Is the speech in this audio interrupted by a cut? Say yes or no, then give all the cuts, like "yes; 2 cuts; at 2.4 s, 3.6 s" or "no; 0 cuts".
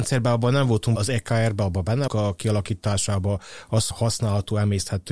yes; 3 cuts; at 1.0 s, 2.1 s, 3.9 s